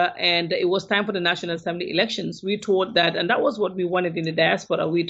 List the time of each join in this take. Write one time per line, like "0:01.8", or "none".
none